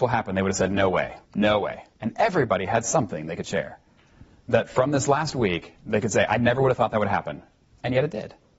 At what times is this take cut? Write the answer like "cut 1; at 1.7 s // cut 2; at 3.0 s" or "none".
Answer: cut 1; at 1.2 s // cut 2; at 1.9 s // cut 3; at 5.8 s